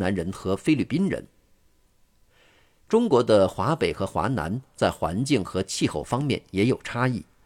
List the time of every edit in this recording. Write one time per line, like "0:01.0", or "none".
none

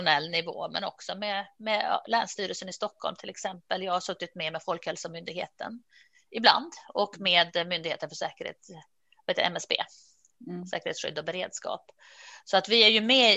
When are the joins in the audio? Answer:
none

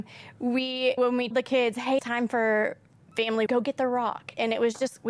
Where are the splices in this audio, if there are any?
0:01.0
0:01.3
0:02.0
0:03.5

